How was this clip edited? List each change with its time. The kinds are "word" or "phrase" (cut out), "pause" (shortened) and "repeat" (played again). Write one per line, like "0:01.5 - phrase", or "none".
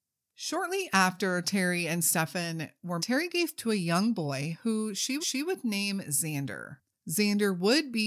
0:03.0 - word
0:03.6 - word
0:05.2 - repeat
0:06.9 - pause